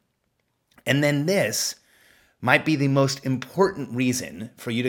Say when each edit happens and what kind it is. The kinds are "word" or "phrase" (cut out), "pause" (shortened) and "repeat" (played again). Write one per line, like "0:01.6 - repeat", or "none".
none